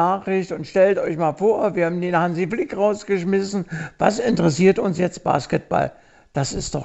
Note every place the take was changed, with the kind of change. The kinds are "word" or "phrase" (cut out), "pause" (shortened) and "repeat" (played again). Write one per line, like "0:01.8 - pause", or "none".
none